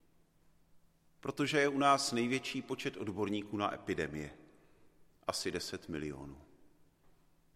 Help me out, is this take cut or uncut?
uncut